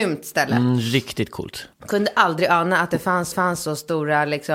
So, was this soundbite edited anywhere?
yes; 2 cuts; at 1.7 s, 3.3 s

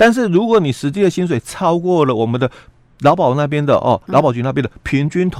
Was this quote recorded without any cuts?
yes; 0 cuts

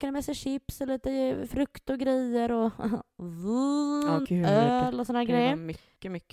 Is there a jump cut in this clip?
yes; 1 cut; at 4.2 s

